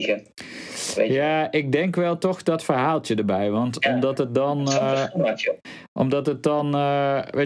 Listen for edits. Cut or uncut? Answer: uncut